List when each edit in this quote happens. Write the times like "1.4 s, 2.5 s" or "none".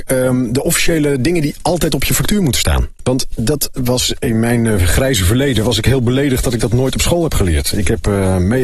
none